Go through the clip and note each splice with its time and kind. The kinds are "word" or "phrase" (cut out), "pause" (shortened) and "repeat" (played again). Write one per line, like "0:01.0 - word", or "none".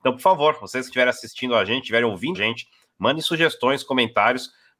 0:02.3 - word